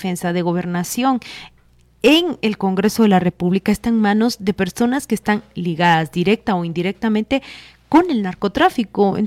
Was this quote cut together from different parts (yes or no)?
no